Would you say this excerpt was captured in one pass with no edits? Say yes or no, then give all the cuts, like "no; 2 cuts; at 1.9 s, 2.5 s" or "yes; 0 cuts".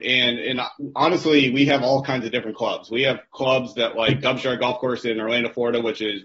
yes; 0 cuts